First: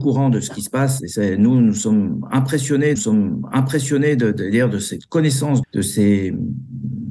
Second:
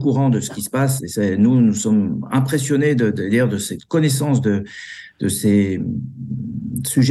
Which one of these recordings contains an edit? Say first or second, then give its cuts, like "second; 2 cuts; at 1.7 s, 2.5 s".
first; 2 cuts; at 3.0 s, 5.6 s